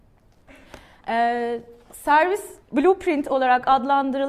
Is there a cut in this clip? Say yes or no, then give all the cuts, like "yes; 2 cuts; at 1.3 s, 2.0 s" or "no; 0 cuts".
yes; 1 cut; at 2.6 s